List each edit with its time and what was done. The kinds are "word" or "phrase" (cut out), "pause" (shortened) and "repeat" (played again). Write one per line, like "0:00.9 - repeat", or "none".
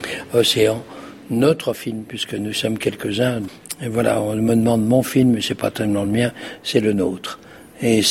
none